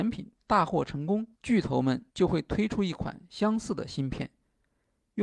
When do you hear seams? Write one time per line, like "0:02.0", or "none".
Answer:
0:01.3
0:02.1